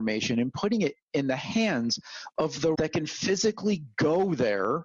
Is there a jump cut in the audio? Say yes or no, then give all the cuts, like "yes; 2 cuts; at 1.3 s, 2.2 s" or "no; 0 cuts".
yes; 1 cut; at 2.7 s